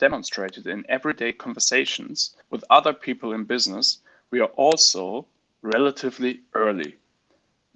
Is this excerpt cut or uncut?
cut